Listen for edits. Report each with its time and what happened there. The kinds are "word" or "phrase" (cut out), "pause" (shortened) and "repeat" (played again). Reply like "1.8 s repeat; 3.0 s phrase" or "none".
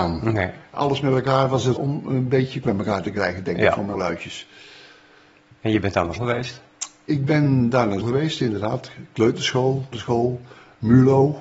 1.8 s word; 2.6 s word; 3.9 s word; 6.2 s word; 8.0 s word; 9.9 s word